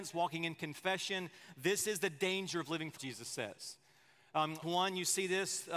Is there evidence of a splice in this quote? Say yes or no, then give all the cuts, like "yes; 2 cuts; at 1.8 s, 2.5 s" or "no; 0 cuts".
yes; 2 cuts; at 3.0 s, 4.6 s